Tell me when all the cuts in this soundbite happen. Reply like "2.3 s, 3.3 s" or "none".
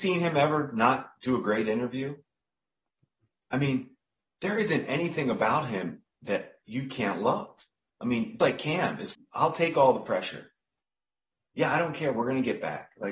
8.4 s, 9.1 s